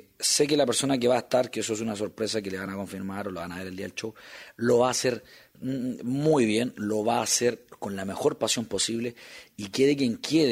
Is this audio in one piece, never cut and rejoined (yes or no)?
yes